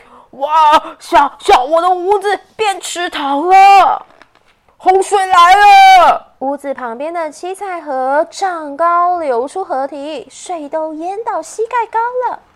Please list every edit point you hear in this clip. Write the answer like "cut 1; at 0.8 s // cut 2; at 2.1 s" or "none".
cut 1; at 6.4 s